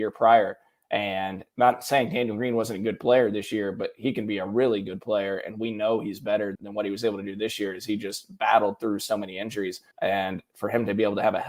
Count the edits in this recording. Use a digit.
2